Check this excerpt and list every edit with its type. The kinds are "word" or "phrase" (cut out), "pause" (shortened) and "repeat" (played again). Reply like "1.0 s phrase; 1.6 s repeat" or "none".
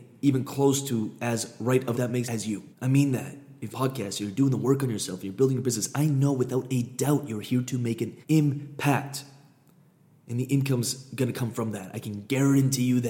1.9 s phrase; 2.2 s word; 2.7 s pause; 3.7 s phrase; 8.2 s pause

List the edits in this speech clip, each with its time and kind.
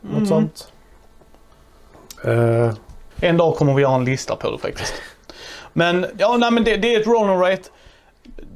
3.1 s pause

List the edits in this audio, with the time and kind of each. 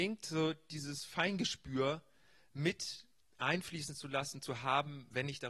none

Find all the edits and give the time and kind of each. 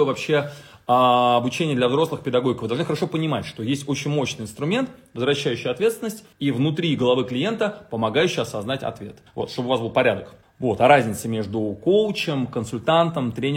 6.3 s pause; 9.3 s pause; 10.4 s pause

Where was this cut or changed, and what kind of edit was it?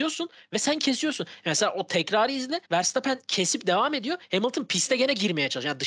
2.6 s pause

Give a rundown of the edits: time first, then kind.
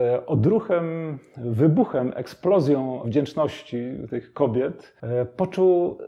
3.0 s word

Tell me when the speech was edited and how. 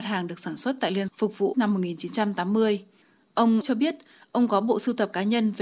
1.1 s word; 1.5 s word; 3.6 s word

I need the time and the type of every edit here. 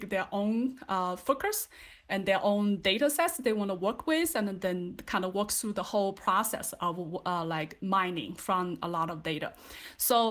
none

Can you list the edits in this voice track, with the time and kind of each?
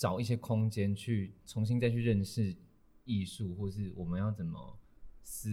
none

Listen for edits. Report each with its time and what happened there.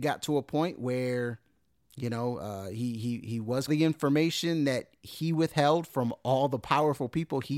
3.7 s phrase

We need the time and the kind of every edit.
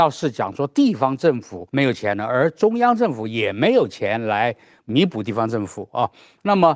1.7 s pause

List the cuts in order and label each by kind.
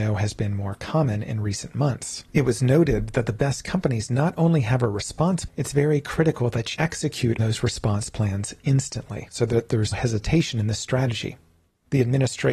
5.5 s word; 6.7 s word; 7.4 s word; 9.9 s word

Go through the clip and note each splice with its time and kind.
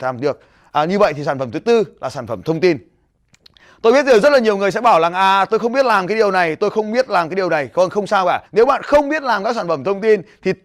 8.5 s pause

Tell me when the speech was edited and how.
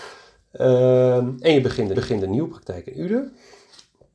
1.9 s repeat

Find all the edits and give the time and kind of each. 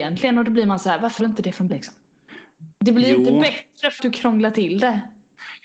1.2 s word; 1.7 s word; 2.7 s pause; 4.0 s word

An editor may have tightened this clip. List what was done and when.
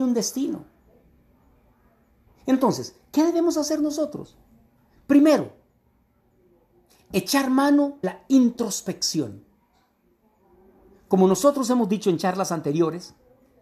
8.0 s word

